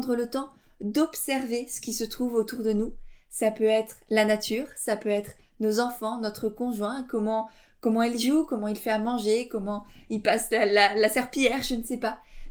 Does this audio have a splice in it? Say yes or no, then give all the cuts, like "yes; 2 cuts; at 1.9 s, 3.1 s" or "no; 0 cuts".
no; 0 cuts